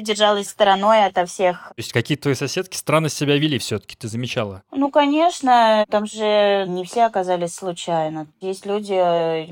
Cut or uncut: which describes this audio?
uncut